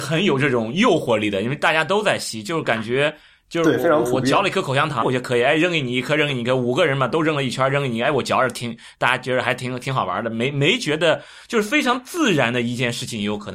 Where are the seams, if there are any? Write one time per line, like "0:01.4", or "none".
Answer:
0:05.0